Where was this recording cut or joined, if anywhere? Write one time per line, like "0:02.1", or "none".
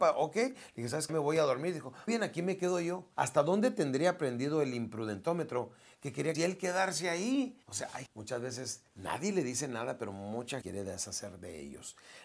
0:01.1
0:02.1
0:03.1
0:06.3
0:07.6
0:08.1
0:08.9
0:10.6